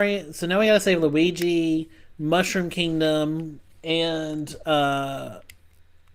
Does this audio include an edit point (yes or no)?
no